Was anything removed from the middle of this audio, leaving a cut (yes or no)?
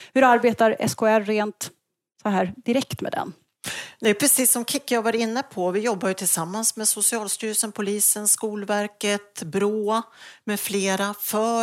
no